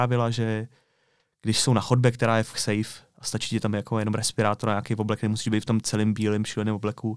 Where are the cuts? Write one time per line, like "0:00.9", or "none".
0:02.5